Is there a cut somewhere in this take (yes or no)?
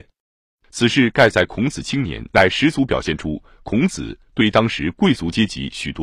yes